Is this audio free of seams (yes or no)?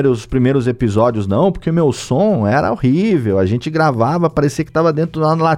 yes